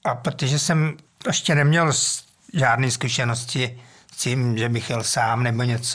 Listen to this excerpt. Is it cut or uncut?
cut